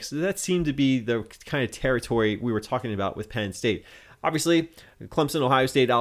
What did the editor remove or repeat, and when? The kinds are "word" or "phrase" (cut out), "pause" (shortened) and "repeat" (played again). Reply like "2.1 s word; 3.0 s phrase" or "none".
none